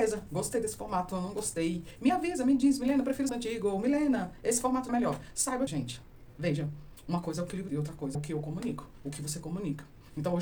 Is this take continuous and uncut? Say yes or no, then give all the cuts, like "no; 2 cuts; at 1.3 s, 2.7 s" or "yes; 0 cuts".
no; 5 cuts; at 3.3 s, 4.9 s, 5.7 s, 7.7 s, 8.1 s